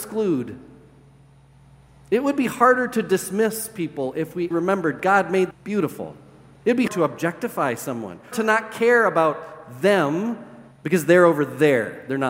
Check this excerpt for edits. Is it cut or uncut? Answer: cut